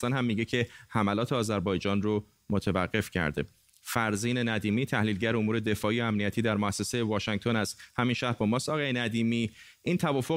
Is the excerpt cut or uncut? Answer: uncut